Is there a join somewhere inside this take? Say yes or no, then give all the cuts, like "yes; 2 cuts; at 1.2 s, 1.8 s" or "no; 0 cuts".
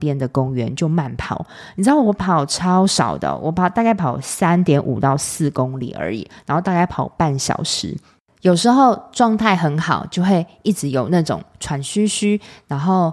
no; 0 cuts